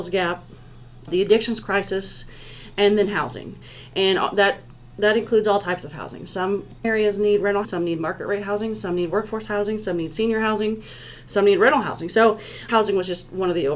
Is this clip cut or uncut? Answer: cut